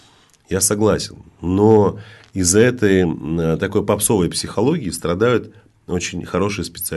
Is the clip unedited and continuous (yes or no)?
yes